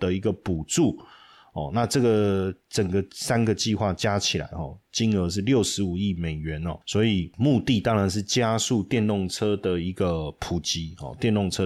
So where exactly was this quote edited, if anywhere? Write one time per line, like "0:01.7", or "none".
none